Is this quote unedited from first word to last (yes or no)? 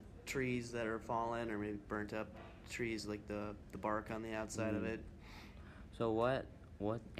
yes